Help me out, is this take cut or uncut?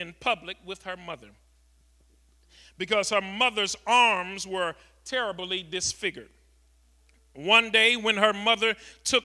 uncut